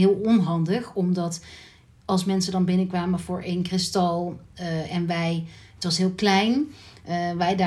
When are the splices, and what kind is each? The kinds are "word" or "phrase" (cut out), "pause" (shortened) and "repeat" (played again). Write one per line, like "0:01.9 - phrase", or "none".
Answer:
none